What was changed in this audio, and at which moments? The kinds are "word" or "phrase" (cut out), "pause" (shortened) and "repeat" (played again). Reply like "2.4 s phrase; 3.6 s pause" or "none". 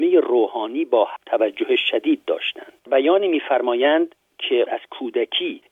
1.2 s word; 2.9 s word; 4.7 s word